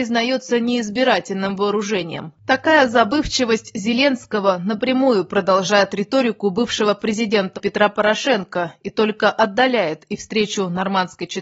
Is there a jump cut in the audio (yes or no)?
yes